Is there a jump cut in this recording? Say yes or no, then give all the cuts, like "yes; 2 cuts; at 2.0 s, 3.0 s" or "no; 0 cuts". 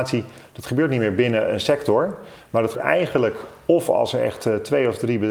yes; 1 cut; at 2.7 s